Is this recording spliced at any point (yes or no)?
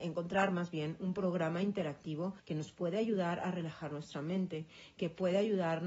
yes